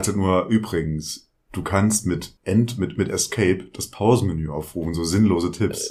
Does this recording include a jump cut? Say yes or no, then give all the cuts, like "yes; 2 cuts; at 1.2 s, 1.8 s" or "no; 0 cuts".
yes; 2 cuts; at 1.4 s, 2.4 s